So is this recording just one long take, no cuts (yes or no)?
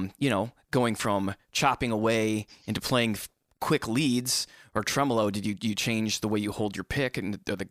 yes